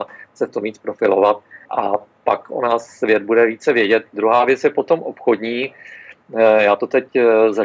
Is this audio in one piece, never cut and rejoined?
no; 1 cut; at 1.6 s

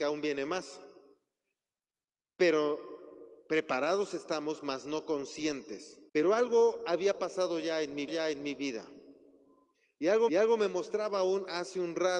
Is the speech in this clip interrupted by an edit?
yes; 3 cuts; at 6.1 s, 8.1 s, 10.3 s

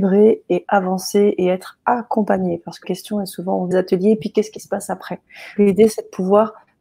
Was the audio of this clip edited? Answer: yes; 3 cuts; at 2.8 s, 3.7 s, 5.6 s

